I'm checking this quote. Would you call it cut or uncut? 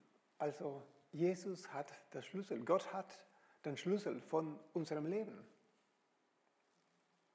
uncut